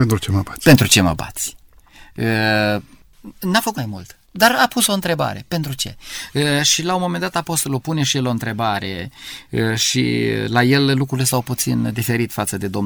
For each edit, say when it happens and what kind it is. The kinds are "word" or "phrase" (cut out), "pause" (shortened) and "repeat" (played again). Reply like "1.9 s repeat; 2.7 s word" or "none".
3.7 s word; 4.2 s pause; 7.8 s word

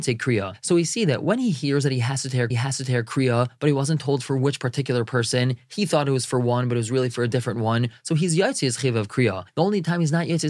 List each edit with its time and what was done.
2.5 s repeat

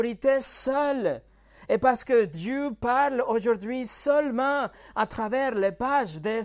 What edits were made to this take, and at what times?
none

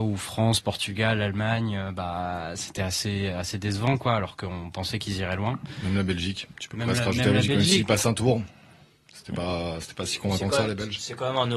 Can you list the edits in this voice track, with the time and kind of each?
none

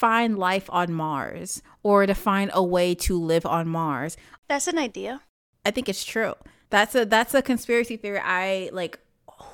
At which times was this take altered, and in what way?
none

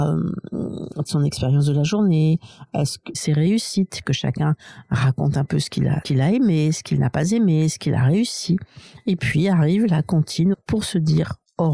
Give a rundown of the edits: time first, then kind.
1.1 s word; 3.1 s word; 6.0 s word; 10.5 s word

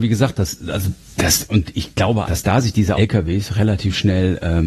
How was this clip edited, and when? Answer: 2.2 s word; 2.9 s word

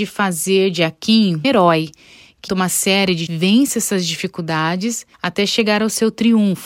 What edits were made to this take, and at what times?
1.4 s word; 2.5 s word; 3.3 s word; 5.1 s pause

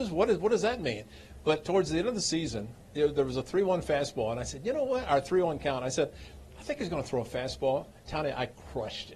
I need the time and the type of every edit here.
none

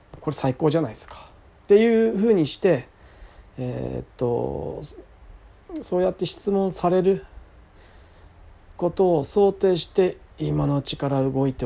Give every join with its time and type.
none

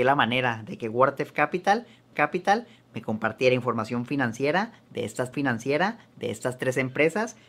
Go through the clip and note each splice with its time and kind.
2.1 s repeat; 5.3 s repeat

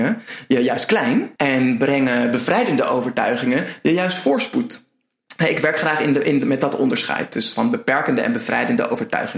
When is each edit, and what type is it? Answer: 1.4 s pause

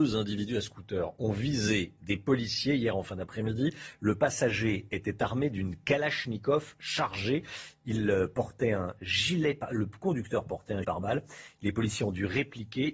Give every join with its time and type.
10.8 s word

